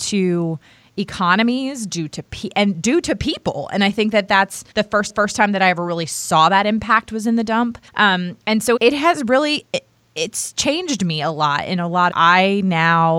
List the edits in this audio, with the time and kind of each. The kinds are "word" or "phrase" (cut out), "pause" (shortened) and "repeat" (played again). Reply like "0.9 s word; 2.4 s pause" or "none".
4.7 s pause; 5.1 s repeat; 7.9 s pause; 8.8 s word; 12.1 s phrase